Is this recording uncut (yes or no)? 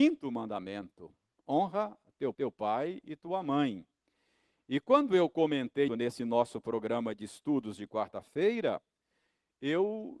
no